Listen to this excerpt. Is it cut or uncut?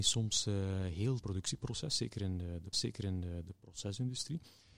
cut